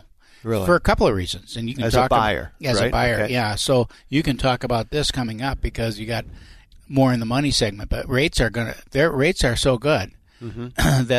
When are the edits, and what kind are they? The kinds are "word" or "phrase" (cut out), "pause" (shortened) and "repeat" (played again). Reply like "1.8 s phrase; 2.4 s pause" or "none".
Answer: 6.7 s word